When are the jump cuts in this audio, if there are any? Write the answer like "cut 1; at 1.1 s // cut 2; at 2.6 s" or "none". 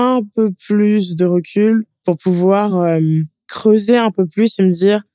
none